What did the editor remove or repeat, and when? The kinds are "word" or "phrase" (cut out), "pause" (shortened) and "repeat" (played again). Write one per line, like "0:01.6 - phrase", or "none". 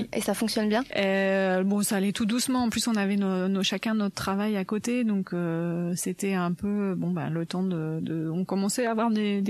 none